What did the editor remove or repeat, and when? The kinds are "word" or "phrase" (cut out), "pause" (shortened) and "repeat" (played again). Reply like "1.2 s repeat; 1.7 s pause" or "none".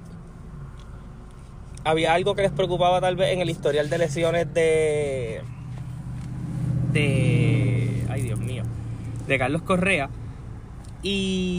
none